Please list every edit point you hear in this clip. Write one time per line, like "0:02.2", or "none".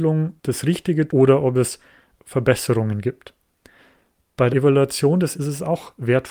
0:01.1
0:02.2
0:04.5
0:05.3